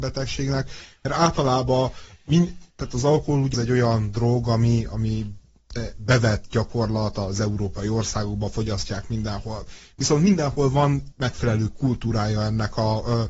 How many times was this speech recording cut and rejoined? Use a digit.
3